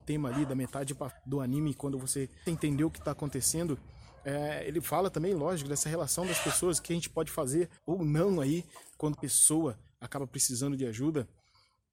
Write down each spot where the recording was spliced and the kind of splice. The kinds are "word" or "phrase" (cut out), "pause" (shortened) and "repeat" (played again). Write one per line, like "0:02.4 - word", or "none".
0:01.1 - word
0:02.5 - word
0:07.8 - pause
0:09.1 - word